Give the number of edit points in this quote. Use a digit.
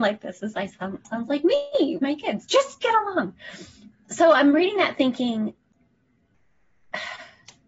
2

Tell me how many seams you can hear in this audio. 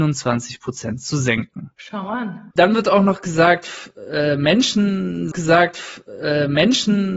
2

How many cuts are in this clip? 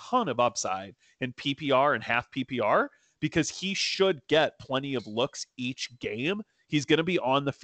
0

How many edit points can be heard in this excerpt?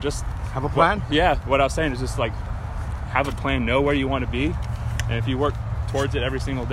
0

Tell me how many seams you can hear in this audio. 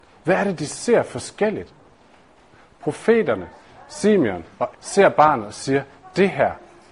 1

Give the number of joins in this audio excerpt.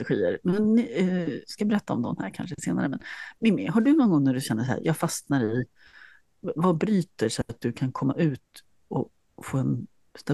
0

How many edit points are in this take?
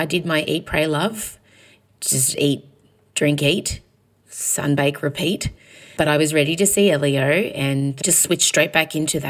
0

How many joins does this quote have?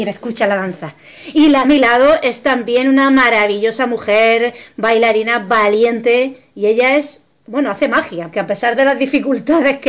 2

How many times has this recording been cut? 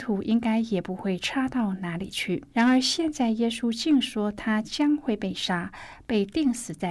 1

